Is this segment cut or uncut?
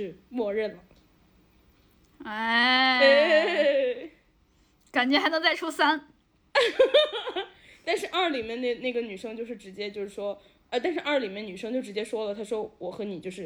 uncut